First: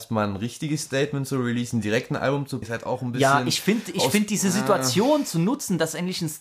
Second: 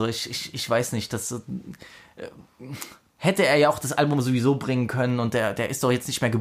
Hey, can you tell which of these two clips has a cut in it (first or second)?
first